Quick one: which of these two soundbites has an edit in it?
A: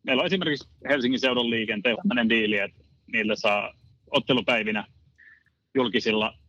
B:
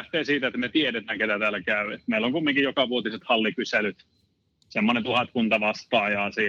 A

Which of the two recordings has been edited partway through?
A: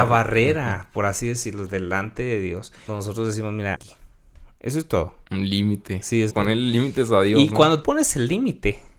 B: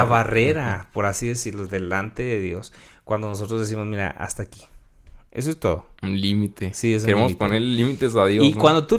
A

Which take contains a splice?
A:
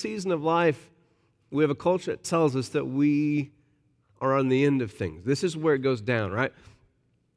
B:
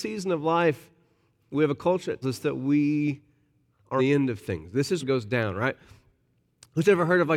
B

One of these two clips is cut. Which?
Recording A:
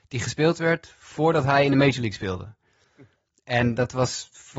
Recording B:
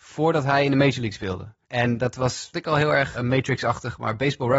B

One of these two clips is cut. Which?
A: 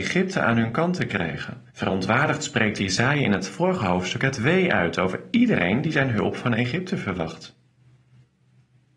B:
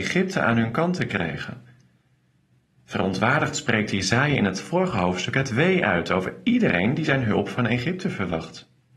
A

